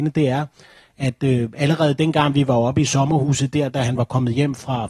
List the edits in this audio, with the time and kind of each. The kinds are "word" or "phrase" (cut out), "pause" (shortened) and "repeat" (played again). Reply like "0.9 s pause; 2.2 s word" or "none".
none